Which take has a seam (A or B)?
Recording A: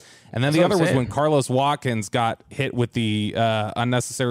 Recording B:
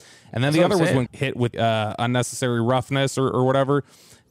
B